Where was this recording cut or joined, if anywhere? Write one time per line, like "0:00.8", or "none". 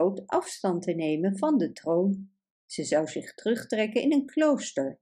none

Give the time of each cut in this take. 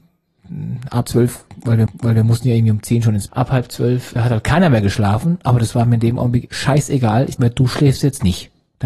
0:01.1
0:01.9
0:03.3
0:04.2
0:06.5
0:07.4

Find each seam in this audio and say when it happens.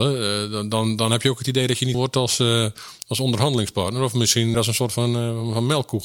0:01.9
0:04.5

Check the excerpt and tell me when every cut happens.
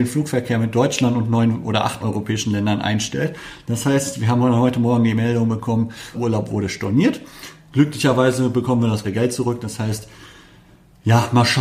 0:02.0
0:06.1
0:09.0

